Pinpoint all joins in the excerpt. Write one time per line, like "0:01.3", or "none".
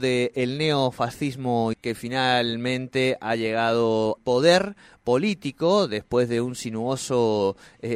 0:01.7
0:04.2